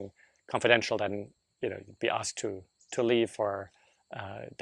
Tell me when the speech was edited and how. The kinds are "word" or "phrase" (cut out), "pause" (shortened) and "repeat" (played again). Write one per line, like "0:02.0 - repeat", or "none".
none